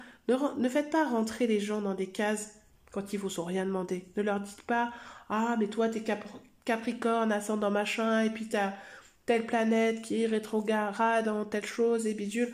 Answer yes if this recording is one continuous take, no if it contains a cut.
yes